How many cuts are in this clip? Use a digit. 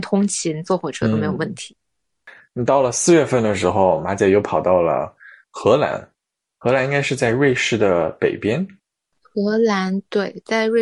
0